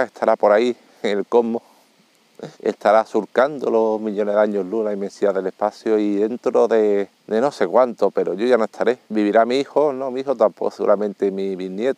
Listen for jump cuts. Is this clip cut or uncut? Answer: cut